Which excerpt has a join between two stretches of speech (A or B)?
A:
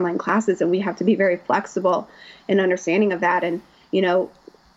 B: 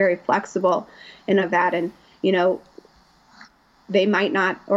B